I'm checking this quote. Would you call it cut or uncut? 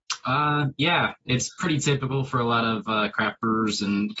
uncut